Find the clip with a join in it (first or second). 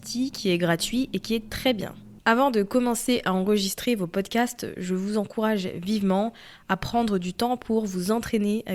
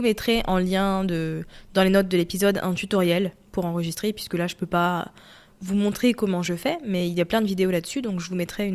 first